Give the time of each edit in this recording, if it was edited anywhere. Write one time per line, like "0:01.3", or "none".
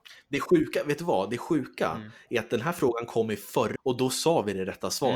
0:03.8